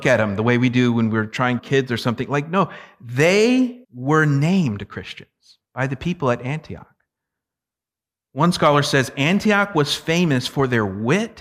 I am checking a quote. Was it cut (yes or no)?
yes